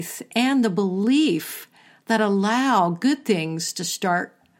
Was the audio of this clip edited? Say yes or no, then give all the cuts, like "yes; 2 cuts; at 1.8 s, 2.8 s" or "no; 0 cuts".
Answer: no; 0 cuts